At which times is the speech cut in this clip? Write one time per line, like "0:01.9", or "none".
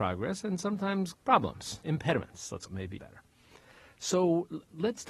0:01.1
0:01.8
0:02.7
0:03.0